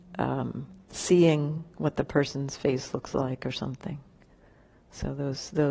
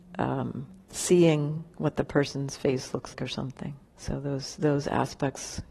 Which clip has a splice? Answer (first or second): second